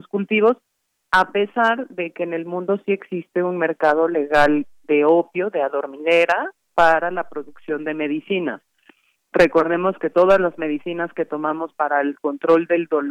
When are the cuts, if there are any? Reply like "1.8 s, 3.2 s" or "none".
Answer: none

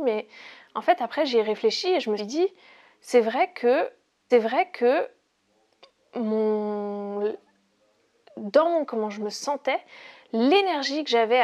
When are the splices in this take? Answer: 2.2 s, 4.3 s, 8.9 s

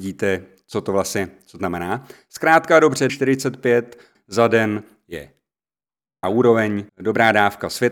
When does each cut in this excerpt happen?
1.6 s, 3.1 s, 4.1 s, 6.2 s, 6.9 s

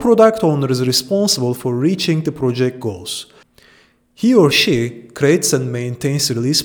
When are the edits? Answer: none

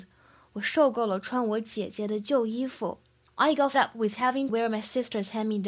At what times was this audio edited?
3.7 s, 4.5 s

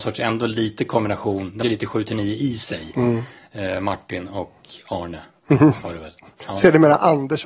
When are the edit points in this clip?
1.6 s

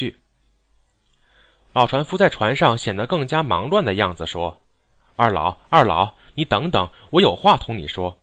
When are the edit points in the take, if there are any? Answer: 4.6 s

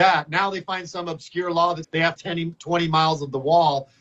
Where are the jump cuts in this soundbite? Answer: 1.8 s, 2.2 s

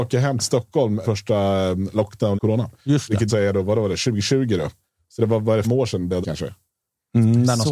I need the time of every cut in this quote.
1.0 s, 2.4 s, 3.3 s, 5.6 s, 6.2 s

